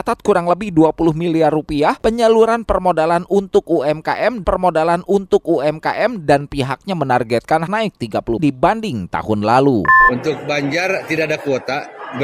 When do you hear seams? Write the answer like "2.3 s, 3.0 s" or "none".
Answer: 4.4 s, 7.7 s, 8.4 s